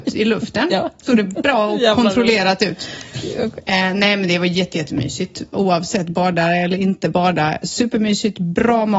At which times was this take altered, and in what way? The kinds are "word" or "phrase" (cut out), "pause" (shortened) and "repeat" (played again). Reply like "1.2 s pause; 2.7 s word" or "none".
1.3 s word